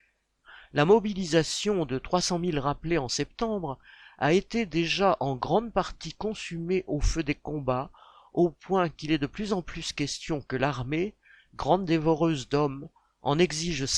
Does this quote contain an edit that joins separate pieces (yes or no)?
no